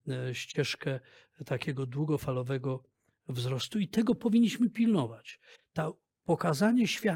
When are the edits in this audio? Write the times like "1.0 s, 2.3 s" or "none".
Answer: none